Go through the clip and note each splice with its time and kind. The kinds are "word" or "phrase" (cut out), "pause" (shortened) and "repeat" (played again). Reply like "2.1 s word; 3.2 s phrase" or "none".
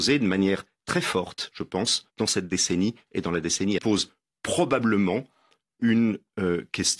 2.1 s pause; 3.8 s phrase